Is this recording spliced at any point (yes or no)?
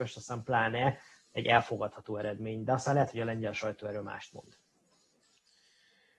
no